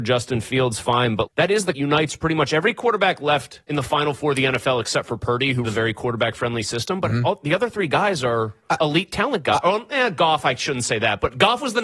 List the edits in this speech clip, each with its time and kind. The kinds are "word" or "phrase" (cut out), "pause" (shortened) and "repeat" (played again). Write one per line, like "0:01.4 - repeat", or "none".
0:01.3 - word
0:01.7 - phrase
0:03.6 - pause
0:05.6 - phrase